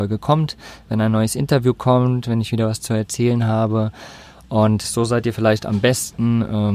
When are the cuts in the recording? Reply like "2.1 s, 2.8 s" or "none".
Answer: none